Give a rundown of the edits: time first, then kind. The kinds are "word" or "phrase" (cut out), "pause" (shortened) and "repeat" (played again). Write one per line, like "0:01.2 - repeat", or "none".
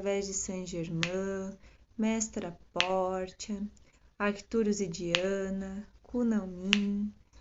none